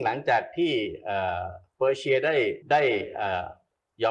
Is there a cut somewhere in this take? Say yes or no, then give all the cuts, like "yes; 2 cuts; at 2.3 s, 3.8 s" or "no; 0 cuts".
yes; 1 cut; at 2.6 s